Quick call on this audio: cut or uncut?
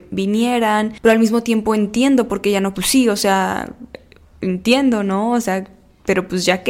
cut